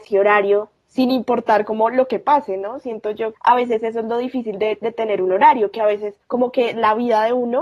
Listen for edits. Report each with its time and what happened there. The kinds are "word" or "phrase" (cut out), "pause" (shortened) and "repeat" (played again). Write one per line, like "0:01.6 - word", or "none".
0:03.3 - word
0:06.2 - pause